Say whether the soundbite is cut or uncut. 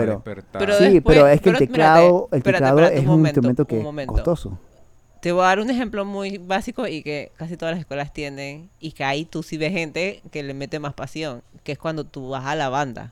uncut